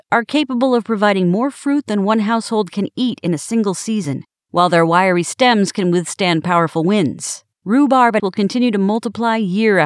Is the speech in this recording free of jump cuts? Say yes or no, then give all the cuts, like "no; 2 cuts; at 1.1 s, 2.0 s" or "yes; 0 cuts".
no; 2 cuts; at 7.5 s, 8.2 s